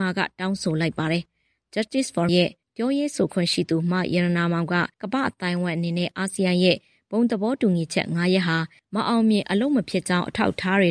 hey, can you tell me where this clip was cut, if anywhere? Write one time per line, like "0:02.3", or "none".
0:02.3
0:04.9